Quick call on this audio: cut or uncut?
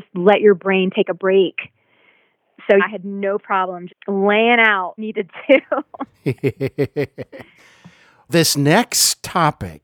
cut